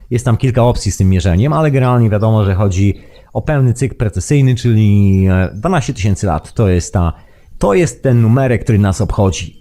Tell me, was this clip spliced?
no; 0 cuts

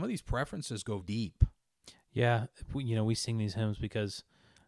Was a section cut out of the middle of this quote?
yes; 1 cut; at 1.0 s

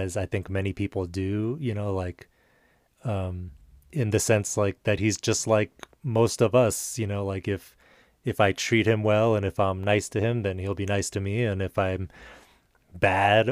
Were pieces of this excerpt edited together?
no; 0 cuts

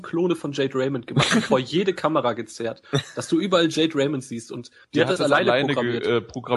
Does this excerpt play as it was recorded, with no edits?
yes; 0 cuts

